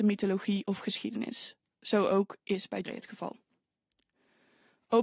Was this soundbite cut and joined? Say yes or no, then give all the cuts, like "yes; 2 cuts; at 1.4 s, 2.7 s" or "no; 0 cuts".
yes; 1 cut; at 2.8 s